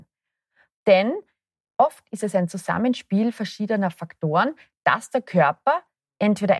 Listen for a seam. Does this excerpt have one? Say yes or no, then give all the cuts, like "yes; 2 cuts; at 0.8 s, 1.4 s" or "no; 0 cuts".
no; 0 cuts